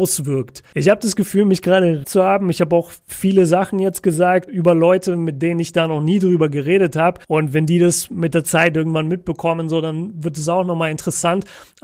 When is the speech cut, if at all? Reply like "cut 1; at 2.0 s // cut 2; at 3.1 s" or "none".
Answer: cut 1; at 2.0 s // cut 2; at 4.5 s // cut 3; at 7.2 s